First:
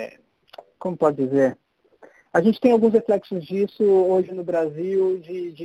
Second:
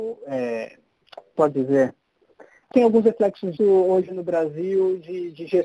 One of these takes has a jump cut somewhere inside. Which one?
second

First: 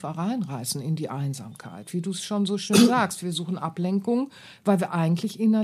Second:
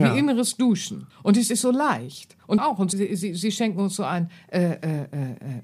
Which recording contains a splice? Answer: second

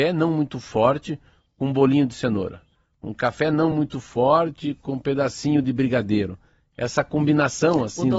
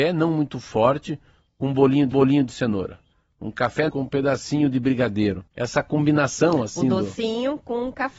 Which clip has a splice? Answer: second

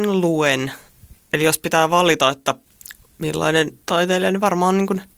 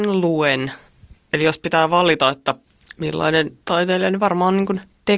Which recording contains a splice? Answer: second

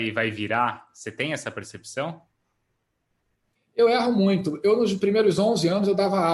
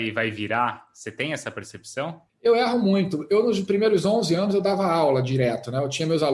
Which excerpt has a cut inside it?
second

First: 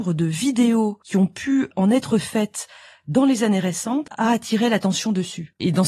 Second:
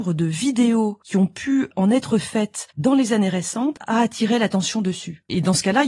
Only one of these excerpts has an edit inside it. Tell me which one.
second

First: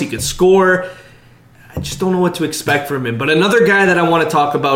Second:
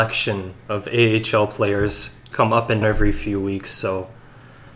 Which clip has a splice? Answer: second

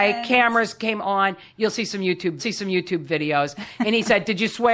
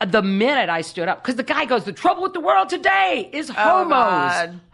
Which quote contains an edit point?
first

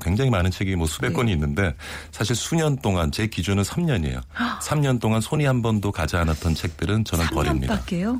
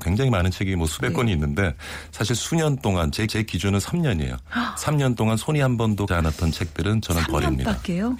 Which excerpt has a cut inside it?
second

